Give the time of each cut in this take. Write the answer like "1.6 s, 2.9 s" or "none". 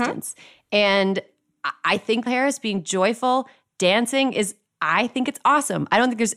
2.3 s